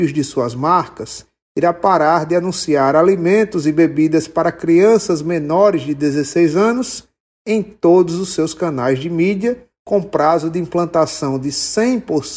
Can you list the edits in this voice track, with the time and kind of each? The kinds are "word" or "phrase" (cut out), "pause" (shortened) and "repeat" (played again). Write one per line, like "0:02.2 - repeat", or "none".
none